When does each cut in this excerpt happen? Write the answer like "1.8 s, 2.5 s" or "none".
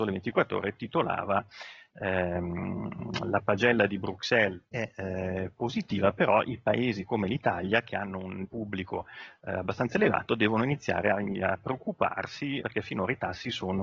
4.7 s, 8.4 s, 12.6 s

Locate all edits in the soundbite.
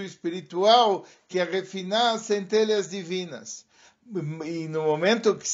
none

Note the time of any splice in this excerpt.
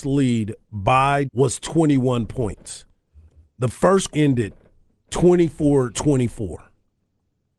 1.3 s, 4.1 s, 5.9 s

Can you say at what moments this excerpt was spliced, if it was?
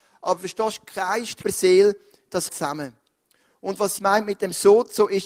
1.4 s, 2.5 s, 4.0 s

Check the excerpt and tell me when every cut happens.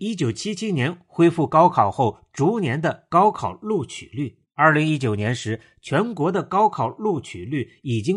4.4 s

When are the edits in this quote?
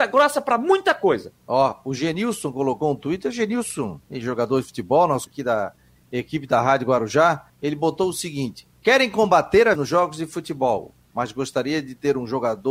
1.4 s, 4.0 s, 5.3 s, 7.5 s, 8.7 s, 9.8 s

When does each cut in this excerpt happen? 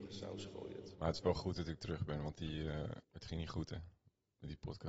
0.9 s, 3.0 s

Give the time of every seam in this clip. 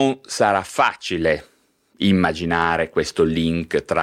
none

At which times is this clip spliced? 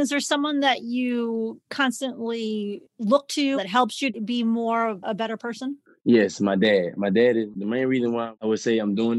3.5 s

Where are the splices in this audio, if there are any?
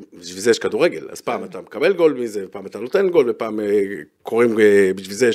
none

